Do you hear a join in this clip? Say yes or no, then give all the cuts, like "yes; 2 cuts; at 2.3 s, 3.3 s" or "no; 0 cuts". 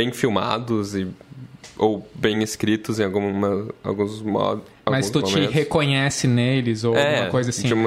no; 0 cuts